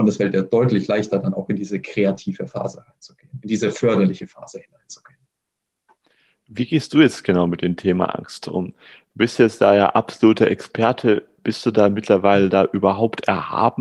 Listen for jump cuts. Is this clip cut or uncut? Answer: uncut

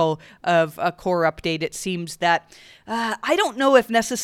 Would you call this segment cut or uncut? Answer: uncut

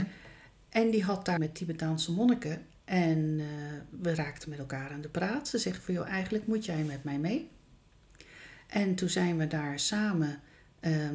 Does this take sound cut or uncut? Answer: cut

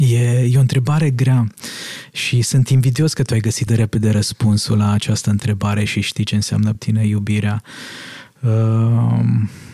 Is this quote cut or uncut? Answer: cut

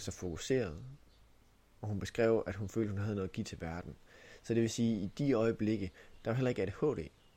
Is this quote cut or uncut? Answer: uncut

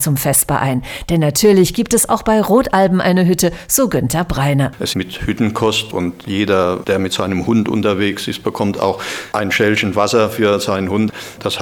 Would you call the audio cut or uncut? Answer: cut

